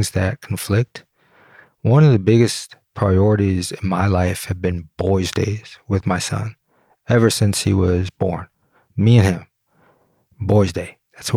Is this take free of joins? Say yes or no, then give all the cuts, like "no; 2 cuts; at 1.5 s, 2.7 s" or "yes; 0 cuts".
yes; 0 cuts